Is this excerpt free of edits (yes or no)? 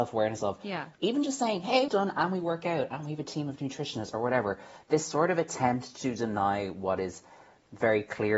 no